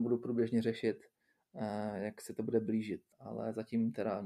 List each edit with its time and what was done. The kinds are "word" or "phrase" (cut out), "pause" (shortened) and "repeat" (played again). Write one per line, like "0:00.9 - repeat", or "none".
0:03.1 - pause